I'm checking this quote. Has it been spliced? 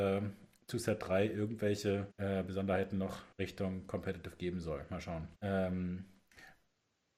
yes; 3 cuts; at 2.1 s, 3.3 s, 5.3 s

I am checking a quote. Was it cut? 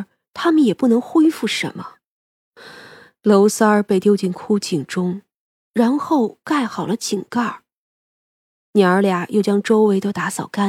no; 0 cuts

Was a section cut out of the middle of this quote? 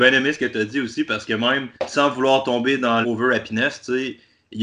yes; 2 cuts; at 1.7 s, 3.0 s

